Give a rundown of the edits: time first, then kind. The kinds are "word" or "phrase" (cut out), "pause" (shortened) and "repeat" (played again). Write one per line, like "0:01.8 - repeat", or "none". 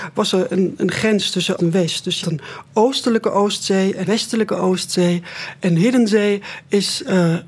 0:01.6 - word
0:02.2 - word
0:04.0 - word